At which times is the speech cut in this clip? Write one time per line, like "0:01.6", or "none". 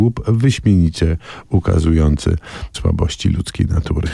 0:02.7